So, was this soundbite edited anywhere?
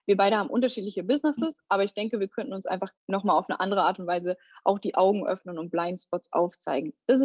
yes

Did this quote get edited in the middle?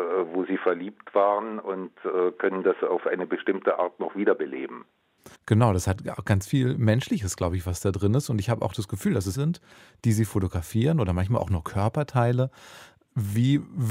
yes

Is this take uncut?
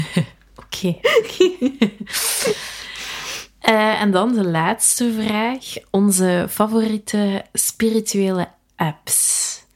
yes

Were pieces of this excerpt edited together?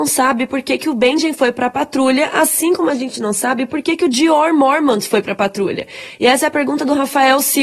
no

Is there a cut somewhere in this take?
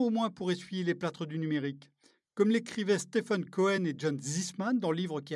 no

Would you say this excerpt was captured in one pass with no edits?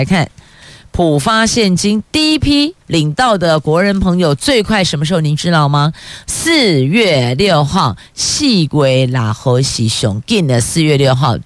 no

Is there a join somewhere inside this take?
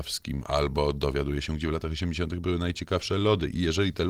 no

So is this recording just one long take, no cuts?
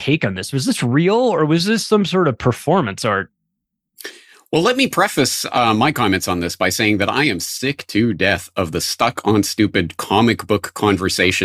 yes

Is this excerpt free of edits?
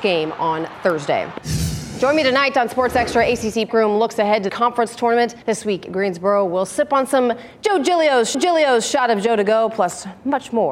no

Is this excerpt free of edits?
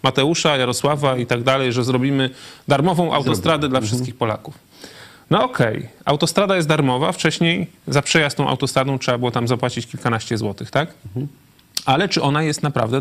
yes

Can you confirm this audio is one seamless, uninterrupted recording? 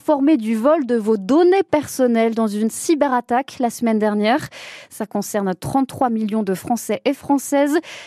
yes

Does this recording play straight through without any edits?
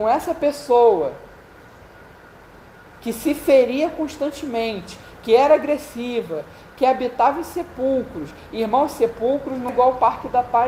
no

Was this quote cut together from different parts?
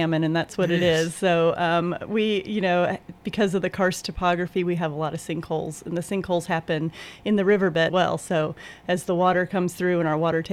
yes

